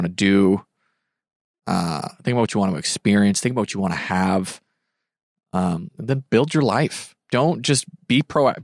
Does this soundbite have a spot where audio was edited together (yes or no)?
no